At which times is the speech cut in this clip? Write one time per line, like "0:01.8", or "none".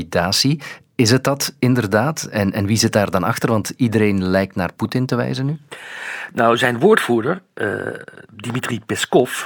none